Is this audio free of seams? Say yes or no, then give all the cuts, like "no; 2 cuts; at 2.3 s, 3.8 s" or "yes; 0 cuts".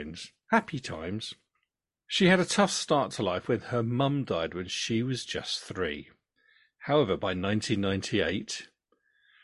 yes; 0 cuts